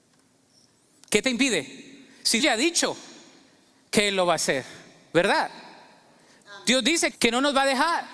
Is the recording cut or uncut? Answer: cut